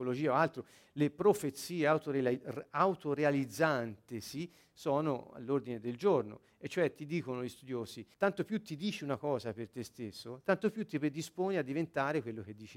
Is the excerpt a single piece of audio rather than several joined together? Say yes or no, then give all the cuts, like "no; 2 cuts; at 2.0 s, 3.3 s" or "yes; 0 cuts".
no; 1 cut; at 8.1 s